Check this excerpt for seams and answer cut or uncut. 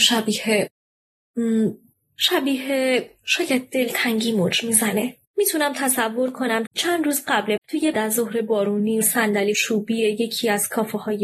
cut